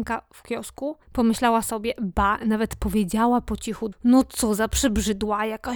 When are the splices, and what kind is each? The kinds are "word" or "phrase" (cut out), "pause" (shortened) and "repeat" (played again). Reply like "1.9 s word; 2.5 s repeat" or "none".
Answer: 1.0 s pause; 3.9 s word

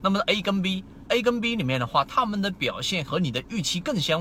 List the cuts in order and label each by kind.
1.1 s phrase

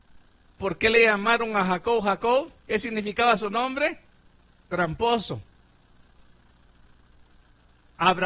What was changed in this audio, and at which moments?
2.6 s pause; 4.3 s pause

